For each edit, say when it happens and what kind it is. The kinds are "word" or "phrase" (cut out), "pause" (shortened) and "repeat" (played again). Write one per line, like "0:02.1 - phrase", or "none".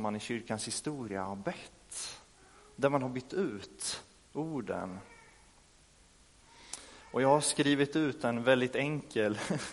none